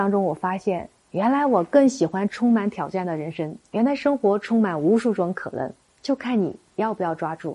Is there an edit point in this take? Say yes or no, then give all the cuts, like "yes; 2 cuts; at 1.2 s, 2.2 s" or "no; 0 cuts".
no; 0 cuts